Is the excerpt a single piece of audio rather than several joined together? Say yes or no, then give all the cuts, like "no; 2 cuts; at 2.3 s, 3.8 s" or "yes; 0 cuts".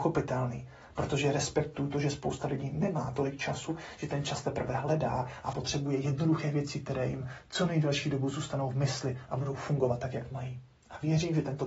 yes; 0 cuts